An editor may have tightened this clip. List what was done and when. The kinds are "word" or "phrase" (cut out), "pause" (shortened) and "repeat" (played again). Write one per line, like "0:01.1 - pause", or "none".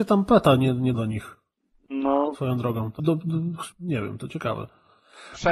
0:00.9 - word
0:03.0 - word
0:03.7 - pause